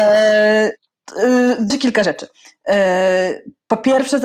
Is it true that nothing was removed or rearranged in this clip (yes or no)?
no